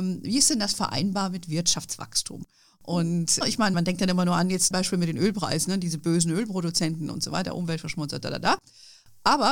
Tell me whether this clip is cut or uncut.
cut